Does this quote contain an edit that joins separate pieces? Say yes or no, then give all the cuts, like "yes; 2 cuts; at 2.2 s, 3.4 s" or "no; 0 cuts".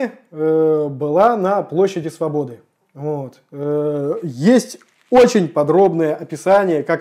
no; 0 cuts